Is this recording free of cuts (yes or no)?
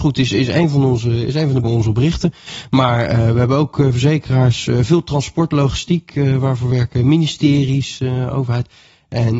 no